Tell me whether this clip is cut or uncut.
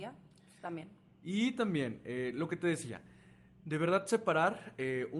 uncut